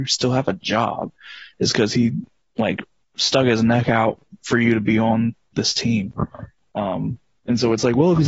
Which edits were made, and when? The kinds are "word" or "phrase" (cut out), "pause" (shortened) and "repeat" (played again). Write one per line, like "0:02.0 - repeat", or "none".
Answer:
none